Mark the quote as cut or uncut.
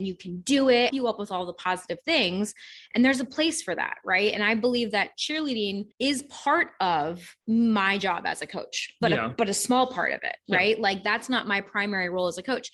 cut